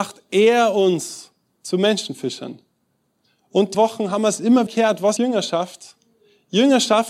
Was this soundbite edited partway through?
yes; 3 cuts; at 3.7 s, 4.7 s, 5.2 s

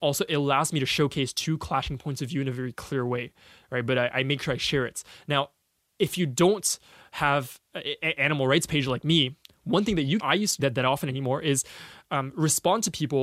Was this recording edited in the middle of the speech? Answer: yes; 2 cuts; at 10.2 s, 10.6 s

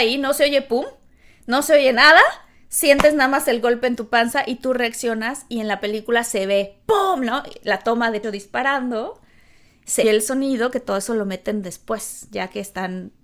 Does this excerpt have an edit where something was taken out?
yes; 2 cuts; at 8.2 s, 10.0 s

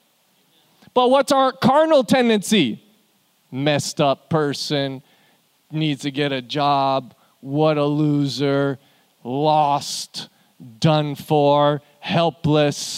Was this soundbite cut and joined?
no; 0 cuts

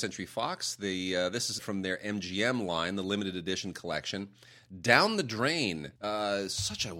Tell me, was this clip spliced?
yes; 2 cuts; at 1.6 s, 6.0 s

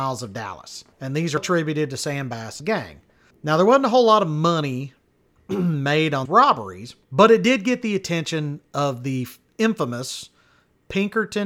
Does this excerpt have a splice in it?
yes; 6 cuts; at 0.9 s, 1.4 s, 2.6 s, 3.3 s, 6.2 s, 7.0 s

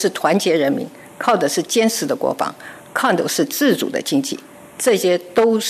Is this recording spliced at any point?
no; 0 cuts

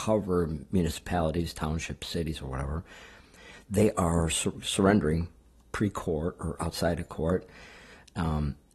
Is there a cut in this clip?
no; 0 cuts

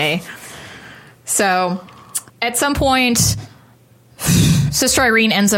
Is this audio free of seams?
no; 1 cut; at 2.3 s

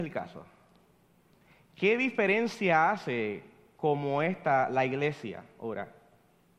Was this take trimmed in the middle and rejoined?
no; 0 cuts

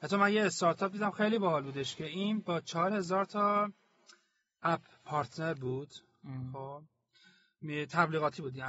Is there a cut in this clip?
no; 0 cuts

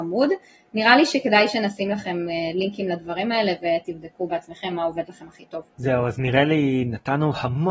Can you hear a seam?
yes; 1 cut; at 5.7 s

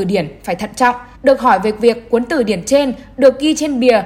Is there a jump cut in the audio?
yes; 1 cut; at 1.1 s

